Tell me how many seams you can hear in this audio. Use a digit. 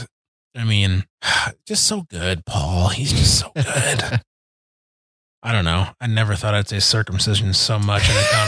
0